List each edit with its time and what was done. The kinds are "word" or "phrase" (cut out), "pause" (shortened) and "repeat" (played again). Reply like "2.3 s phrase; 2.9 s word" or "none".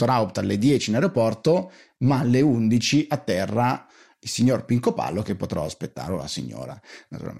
none